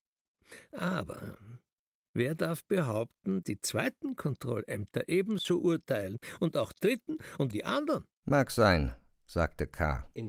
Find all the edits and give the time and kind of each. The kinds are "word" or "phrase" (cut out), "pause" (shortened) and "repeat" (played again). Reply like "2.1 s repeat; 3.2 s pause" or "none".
3.4 s word; 6.7 s word; 7.5 s word; 8.2 s pause